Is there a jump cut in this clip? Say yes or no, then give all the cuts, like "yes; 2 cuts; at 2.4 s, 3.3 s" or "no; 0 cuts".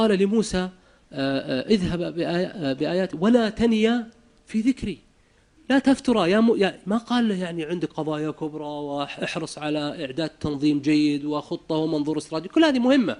no; 0 cuts